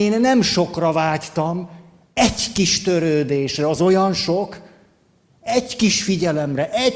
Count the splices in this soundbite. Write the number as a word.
zero